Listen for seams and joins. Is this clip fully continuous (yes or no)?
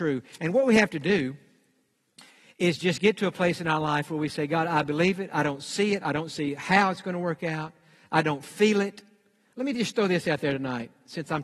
yes